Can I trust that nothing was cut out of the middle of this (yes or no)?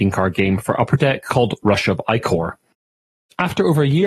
yes